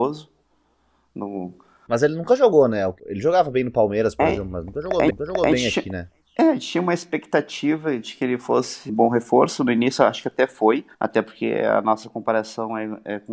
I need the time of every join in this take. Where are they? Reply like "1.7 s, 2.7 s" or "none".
3.0 s, 5.1 s, 8.9 s, 10.9 s